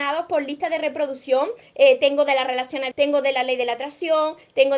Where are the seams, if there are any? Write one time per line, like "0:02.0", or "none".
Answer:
0:02.9